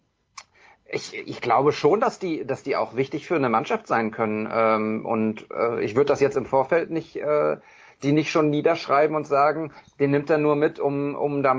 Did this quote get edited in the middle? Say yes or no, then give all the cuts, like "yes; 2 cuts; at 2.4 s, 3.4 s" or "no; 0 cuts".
no; 0 cuts